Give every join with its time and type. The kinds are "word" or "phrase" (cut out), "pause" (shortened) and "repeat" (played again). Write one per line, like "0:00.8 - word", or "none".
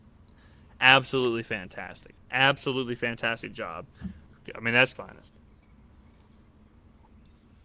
0:04.9 - phrase